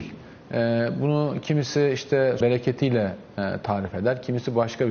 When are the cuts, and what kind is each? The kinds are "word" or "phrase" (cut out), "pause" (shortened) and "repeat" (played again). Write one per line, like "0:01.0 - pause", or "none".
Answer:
0:02.4 - word